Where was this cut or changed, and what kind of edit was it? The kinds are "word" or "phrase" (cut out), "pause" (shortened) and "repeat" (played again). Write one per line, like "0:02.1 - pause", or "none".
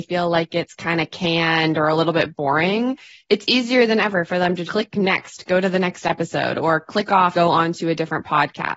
0:04.7 - word
0:07.3 - word